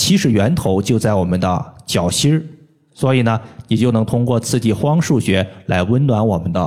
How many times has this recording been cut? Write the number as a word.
zero